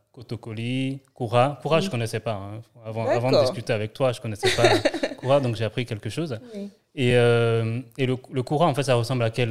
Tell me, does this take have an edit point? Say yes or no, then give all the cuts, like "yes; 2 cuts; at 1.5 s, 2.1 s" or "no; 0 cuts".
no; 0 cuts